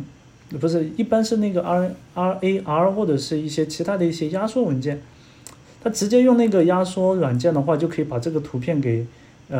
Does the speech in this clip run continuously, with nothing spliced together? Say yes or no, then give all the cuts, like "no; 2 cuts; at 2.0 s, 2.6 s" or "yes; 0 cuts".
yes; 0 cuts